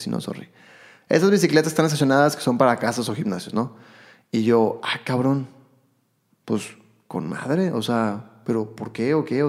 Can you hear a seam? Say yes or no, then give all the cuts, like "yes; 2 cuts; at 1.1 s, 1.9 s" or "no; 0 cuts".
no; 0 cuts